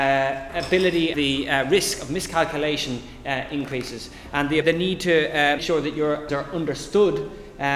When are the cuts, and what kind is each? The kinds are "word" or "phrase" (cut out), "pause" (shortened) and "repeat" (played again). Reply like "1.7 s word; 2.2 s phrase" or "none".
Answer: 1.1 s word; 4.6 s word; 5.6 s word; 6.3 s word